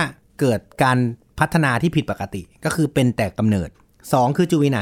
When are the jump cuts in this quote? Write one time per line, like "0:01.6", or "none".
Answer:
0:03.7